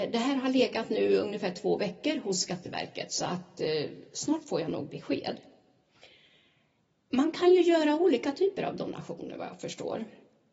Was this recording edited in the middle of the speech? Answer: no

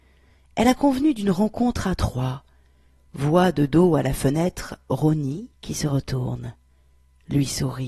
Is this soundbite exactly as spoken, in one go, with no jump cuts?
no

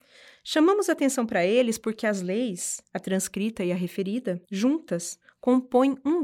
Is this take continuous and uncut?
no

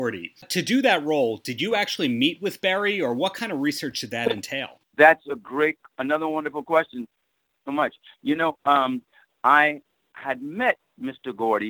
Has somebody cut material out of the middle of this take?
no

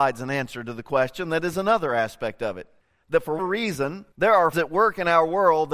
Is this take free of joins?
no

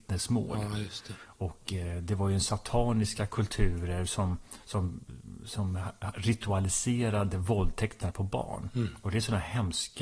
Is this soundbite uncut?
yes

